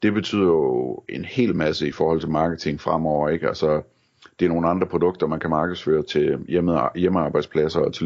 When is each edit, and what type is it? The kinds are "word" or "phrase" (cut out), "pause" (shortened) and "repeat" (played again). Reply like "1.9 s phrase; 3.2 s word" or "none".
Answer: none